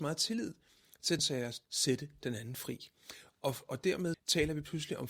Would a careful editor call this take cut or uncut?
cut